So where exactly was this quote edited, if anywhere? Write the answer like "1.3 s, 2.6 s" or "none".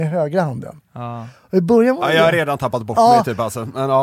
none